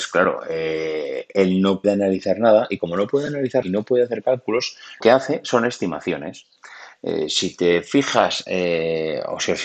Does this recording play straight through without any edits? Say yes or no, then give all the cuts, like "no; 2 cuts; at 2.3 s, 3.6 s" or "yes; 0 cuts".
no; 3 cuts; at 1.8 s, 3.6 s, 5.0 s